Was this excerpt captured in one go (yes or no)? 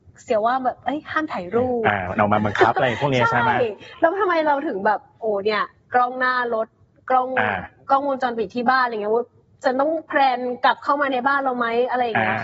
yes